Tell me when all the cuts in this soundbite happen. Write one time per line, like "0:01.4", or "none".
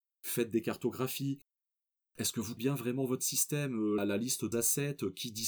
0:02.6
0:04.0
0:04.5